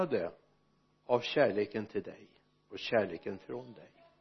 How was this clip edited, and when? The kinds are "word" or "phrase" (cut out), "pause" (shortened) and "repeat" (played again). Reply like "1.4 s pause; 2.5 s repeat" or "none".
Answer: none